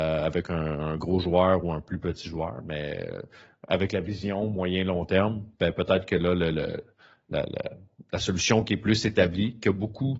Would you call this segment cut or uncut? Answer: uncut